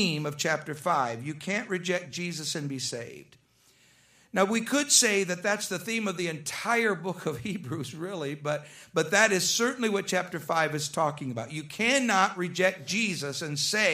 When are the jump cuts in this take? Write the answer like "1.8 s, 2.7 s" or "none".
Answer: none